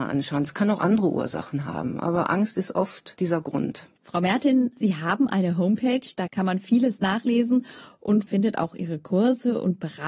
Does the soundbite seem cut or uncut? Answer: cut